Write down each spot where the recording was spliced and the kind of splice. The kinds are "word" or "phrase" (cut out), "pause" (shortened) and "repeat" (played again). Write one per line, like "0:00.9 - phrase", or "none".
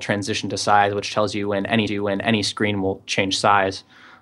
0:01.9 - repeat